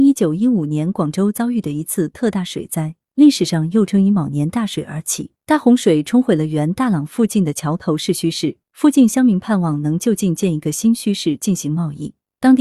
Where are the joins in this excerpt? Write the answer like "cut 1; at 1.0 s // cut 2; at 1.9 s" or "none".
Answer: cut 1; at 5.4 s // cut 2; at 8.6 s